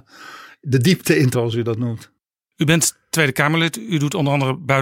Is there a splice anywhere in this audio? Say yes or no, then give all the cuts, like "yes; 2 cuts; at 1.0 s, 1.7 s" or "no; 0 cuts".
yes; 1 cut; at 1.3 s